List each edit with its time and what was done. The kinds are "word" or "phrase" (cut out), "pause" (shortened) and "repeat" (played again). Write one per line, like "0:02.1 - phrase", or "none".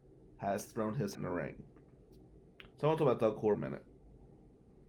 0:01.1 - word
0:02.7 - pause
0:03.5 - phrase